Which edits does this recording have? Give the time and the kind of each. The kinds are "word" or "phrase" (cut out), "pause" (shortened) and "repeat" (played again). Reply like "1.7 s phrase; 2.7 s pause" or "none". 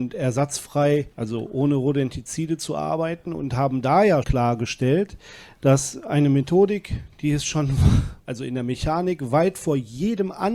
1.1 s pause; 4.2 s word; 8.2 s pause